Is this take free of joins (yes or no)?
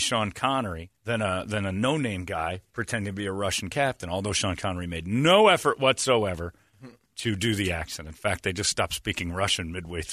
no